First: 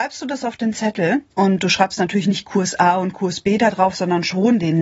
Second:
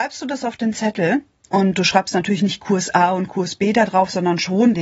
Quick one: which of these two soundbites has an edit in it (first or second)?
first